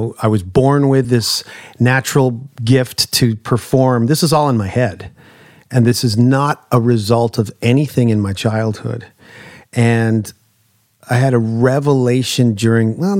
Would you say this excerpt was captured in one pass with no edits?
yes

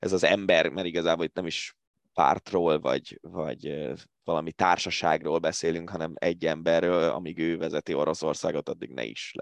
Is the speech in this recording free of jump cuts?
yes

